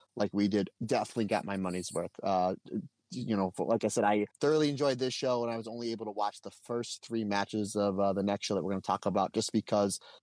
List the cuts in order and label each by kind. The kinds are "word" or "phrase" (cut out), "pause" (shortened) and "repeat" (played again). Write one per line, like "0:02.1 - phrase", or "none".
0:04.3 - pause